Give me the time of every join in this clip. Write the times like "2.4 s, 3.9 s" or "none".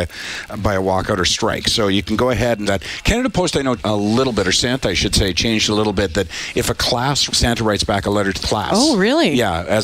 2.7 s, 3.8 s, 7.3 s, 8.4 s